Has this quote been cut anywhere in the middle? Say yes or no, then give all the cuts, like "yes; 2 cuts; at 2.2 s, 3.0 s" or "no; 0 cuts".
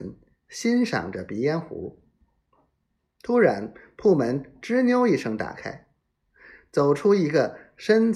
no; 0 cuts